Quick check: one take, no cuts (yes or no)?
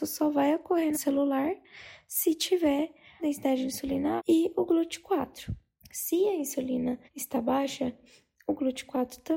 no